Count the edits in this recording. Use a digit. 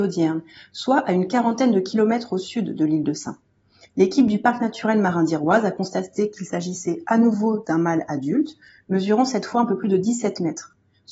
0